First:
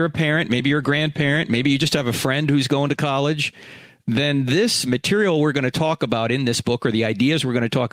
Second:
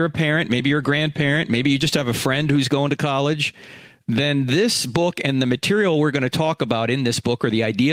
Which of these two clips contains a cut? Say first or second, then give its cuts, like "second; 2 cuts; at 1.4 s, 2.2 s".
first; 1 cut; at 4.9 s